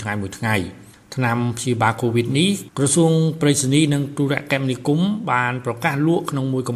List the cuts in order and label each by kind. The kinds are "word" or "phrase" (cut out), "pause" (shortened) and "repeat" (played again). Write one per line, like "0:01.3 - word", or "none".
0:00.9 - pause